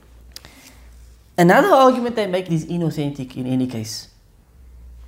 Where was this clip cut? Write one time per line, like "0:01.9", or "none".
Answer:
0:02.5